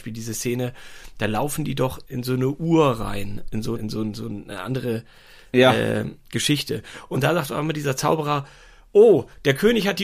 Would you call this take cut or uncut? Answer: cut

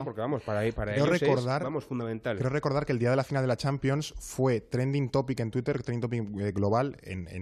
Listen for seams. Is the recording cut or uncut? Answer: uncut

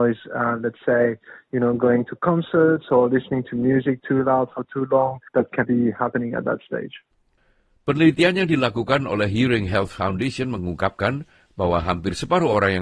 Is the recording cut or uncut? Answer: cut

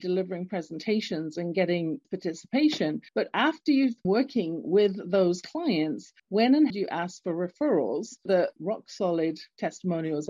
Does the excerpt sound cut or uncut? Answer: cut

